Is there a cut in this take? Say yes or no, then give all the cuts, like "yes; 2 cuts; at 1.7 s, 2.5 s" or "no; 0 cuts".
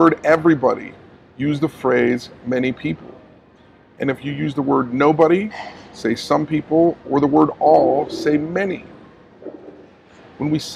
no; 0 cuts